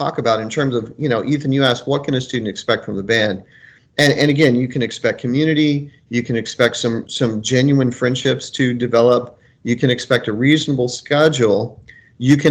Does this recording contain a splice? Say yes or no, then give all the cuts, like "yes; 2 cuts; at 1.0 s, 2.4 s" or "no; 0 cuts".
no; 0 cuts